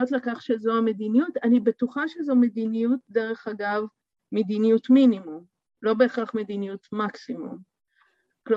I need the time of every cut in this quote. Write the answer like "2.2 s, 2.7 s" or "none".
none

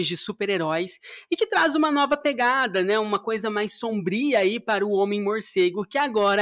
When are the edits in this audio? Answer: none

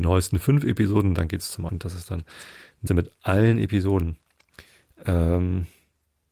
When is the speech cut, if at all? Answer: 1.7 s, 2.9 s

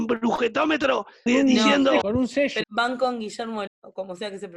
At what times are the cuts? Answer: 1.3 s, 2.0 s, 2.6 s, 3.7 s

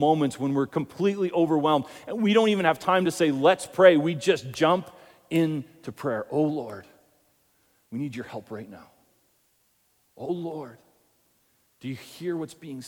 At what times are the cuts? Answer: none

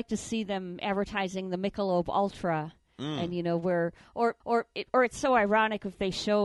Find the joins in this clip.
4.4 s

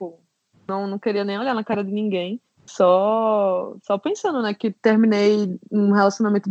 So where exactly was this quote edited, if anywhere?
2.5 s

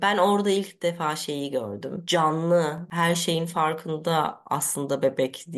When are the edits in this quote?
none

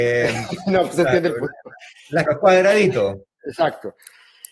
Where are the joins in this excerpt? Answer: 2.3 s

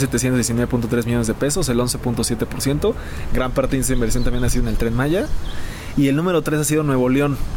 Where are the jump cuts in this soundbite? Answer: none

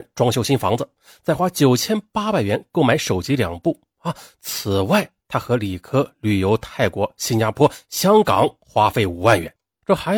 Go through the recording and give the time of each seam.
none

